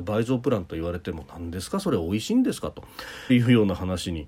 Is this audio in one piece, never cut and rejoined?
no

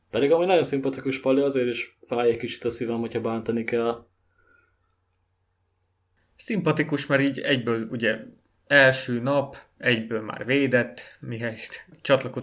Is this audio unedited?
yes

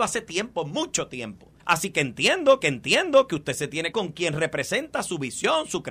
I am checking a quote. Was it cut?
yes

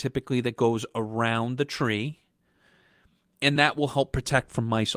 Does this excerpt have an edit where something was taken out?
no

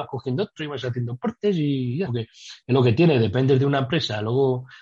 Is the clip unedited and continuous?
no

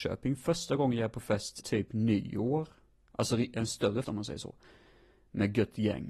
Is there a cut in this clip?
yes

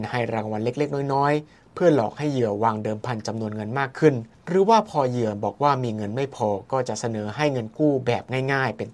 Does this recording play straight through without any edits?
no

